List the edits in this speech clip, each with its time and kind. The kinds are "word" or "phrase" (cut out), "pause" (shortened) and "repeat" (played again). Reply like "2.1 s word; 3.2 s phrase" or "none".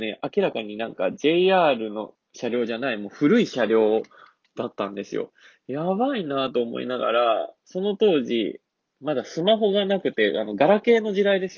none